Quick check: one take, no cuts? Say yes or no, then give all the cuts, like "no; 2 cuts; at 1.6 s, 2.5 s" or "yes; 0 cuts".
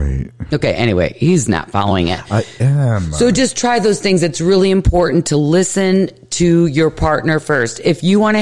yes; 0 cuts